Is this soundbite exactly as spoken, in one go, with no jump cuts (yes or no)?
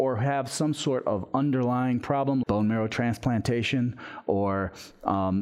no